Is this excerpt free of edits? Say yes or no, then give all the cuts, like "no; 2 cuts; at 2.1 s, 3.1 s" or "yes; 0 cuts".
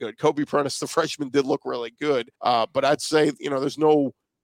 no; 1 cut; at 2.4 s